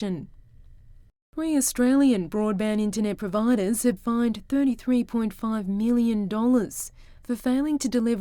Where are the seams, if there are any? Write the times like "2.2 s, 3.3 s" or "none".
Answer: 4.0 s